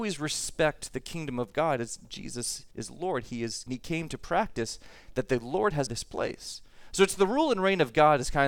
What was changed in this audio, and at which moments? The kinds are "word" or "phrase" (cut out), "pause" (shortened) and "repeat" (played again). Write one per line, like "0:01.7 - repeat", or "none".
0:02.7 - pause
0:03.7 - phrase
0:05.9 - phrase